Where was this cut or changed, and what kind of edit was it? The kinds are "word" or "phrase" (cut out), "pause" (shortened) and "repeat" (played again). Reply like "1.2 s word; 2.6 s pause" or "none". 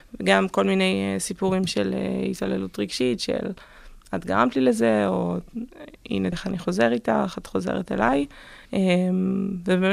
4.0 s pause; 6.3 s word; 7.4 s word; 8.7 s pause